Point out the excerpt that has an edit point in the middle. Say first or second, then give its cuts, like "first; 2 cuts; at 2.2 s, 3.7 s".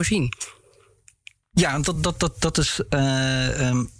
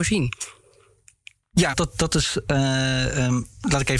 second; 1 cut; at 1.7 s